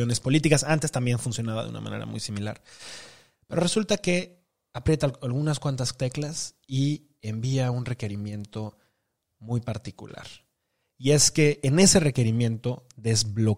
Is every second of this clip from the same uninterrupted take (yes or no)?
yes